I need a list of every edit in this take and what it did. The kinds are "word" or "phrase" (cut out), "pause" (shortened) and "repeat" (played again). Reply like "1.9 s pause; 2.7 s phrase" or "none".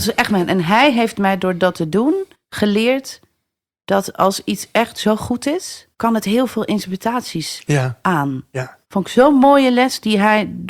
2.3 s pause; 5.9 s pause; 8.8 s pause